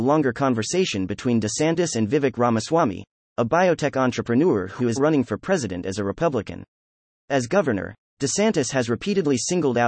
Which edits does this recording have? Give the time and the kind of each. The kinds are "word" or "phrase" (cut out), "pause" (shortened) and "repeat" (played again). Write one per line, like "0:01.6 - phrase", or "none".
0:05.0 - word